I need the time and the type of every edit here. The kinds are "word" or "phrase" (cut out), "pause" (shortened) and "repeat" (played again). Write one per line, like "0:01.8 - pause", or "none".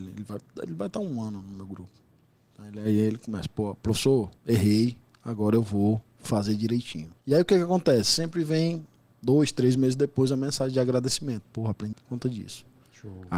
0:04.4 - pause
0:07.2 - pause
0:11.9 - word

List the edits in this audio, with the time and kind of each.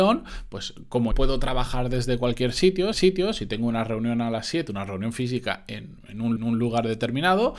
0:01.1 - word
0:02.9 - repeat
0:06.4 - repeat

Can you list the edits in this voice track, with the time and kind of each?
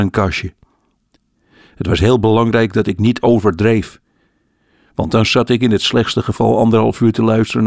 none

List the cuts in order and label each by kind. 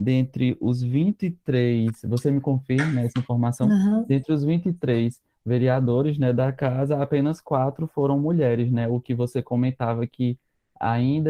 none

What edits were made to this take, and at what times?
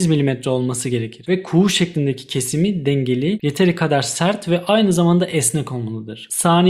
none

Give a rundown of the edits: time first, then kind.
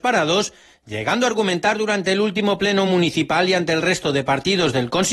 none

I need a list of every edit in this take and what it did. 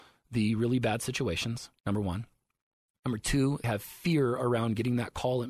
0:01.8 - pause
0:03.6 - word

